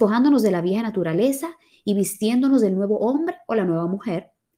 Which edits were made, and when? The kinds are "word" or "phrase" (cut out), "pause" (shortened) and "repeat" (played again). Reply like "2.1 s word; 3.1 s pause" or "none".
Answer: none